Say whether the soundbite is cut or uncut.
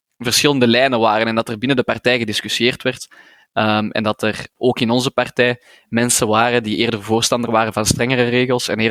cut